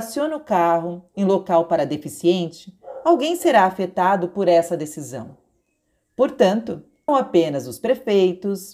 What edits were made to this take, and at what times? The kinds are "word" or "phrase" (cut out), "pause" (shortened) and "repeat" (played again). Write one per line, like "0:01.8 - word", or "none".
0:07.1 - phrase